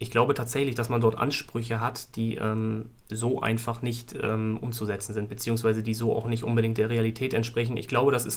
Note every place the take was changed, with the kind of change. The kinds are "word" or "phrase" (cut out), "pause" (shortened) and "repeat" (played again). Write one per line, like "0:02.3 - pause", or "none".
0:03.0 - pause